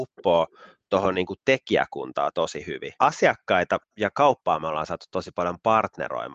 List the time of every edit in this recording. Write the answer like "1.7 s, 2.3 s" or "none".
3.0 s